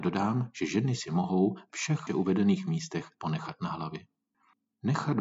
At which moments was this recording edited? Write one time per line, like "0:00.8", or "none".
0:01.7
0:02.1
0:03.2